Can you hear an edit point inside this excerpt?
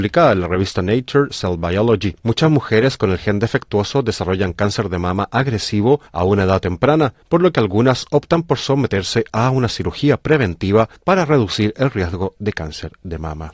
yes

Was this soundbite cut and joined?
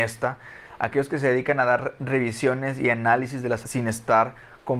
yes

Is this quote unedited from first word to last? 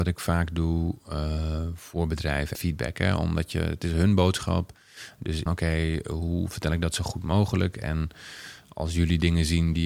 no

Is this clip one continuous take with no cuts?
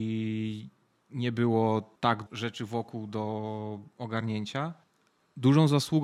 no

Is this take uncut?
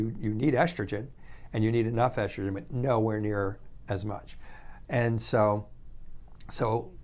yes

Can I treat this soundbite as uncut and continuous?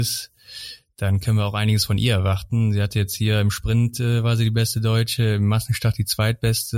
yes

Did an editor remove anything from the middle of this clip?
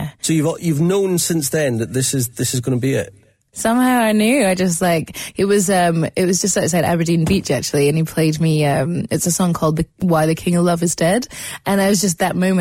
no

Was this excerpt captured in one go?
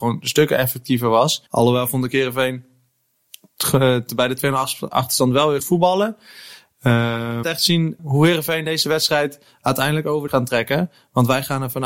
no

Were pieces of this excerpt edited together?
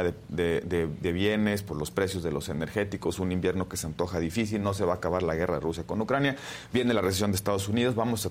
no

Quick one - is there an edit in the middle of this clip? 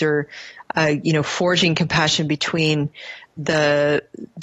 no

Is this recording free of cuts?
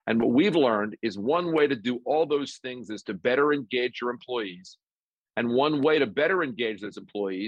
yes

